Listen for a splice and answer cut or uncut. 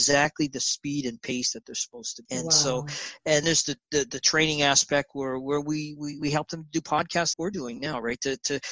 cut